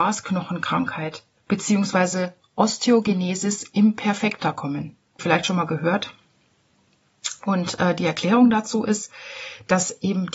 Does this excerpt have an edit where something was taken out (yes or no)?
yes